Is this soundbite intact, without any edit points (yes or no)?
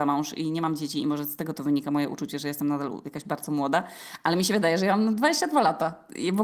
yes